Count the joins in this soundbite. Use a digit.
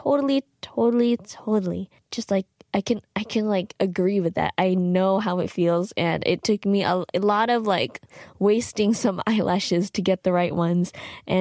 1